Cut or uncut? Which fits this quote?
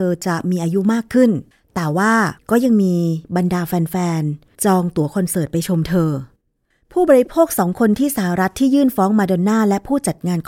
uncut